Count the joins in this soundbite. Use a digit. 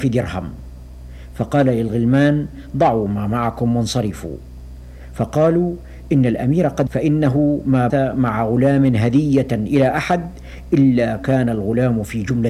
2